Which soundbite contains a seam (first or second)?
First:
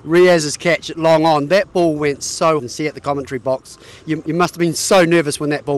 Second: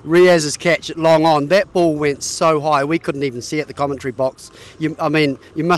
first